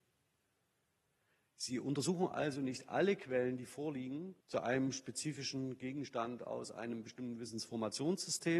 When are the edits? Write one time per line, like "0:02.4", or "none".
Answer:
0:04.4